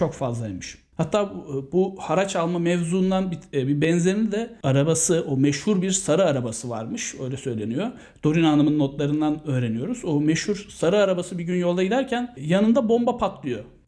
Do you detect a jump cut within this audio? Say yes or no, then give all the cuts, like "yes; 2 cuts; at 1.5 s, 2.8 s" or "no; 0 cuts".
no; 0 cuts